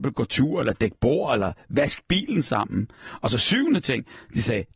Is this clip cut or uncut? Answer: uncut